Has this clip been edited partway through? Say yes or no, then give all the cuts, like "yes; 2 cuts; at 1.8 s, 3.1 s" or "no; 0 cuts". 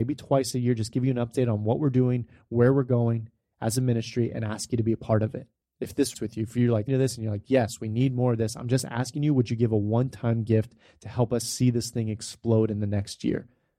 yes; 3 cuts; at 5.5 s, 6.1 s, 6.9 s